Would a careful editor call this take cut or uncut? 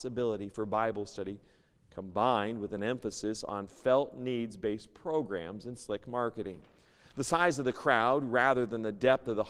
uncut